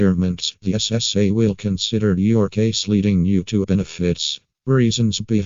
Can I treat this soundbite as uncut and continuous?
no; 1 cut; at 3.6 s

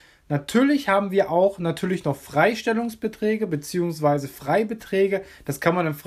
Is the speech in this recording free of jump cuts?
yes; 0 cuts

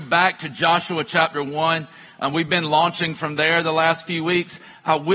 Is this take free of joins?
yes; 0 cuts

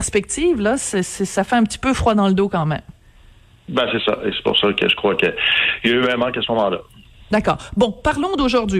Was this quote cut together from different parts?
no; 0 cuts

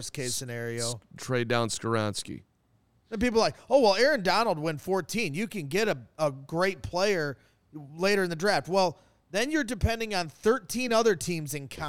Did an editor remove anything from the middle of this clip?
no; 0 cuts

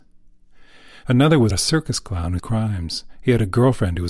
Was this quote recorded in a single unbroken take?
no; 2 cuts; at 1.5 s, 2.4 s

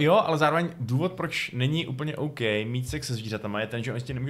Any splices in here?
no; 0 cuts

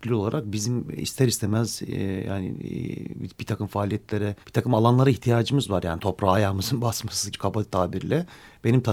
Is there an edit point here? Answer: yes; 2 cuts; at 4.4 s, 7.3 s

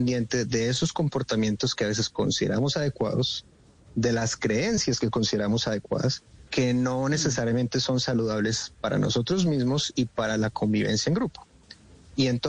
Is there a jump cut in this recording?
yes; 1 cut; at 6.5 s

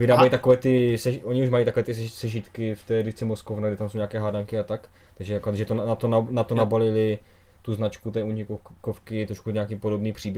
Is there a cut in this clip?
no; 0 cuts

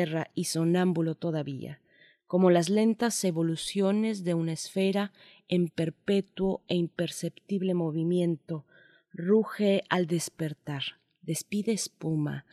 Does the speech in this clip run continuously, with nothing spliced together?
yes; 0 cuts

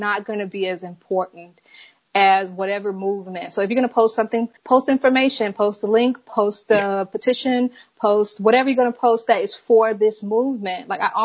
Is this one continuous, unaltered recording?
no; 1 cut; at 4.6 s

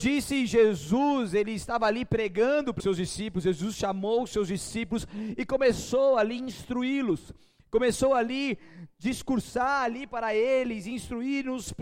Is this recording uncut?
no; 1 cut; at 2.8 s

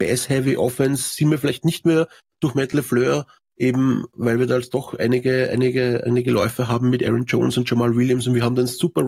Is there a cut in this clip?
no; 0 cuts

